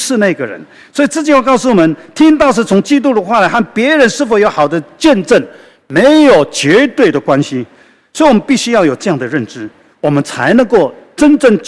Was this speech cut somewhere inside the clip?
no; 0 cuts

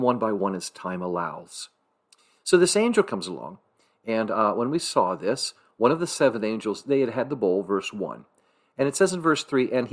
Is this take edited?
no; 0 cuts

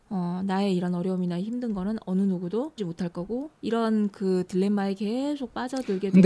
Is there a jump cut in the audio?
yes; 2 cuts; at 2.8 s, 3.6 s

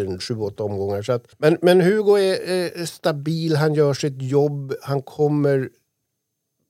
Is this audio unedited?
no; 1 cut; at 1.3 s

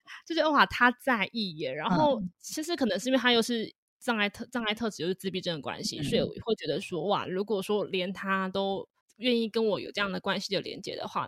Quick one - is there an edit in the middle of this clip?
yes; 2 cuts; at 2.3 s, 9.0 s

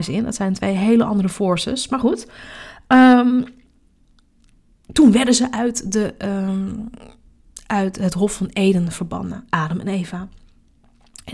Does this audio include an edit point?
no; 0 cuts

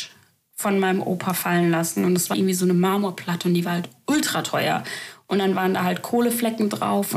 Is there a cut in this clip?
yes; 1 cut; at 2.3 s

